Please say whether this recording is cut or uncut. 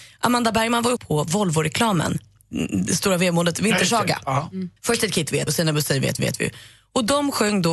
cut